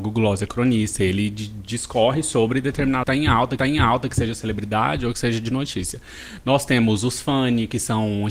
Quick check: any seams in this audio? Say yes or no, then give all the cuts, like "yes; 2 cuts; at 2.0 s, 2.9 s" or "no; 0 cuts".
yes; 2 cuts; at 3.0 s, 3.6 s